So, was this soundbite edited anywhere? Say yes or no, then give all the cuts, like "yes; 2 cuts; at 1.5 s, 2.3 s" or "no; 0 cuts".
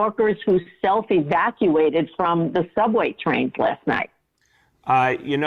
no; 0 cuts